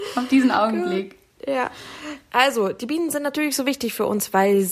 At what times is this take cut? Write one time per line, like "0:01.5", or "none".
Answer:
none